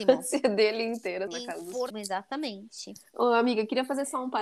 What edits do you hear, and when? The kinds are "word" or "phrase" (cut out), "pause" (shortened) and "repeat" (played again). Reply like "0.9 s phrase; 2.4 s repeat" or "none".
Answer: 1.3 s word; 1.9 s word